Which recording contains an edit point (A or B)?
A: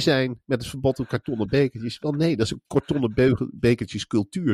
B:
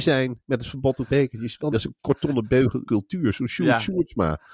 B